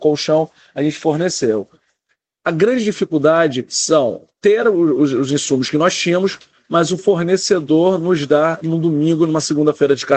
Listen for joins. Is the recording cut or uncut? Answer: uncut